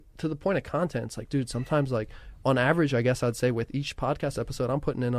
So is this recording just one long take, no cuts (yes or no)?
yes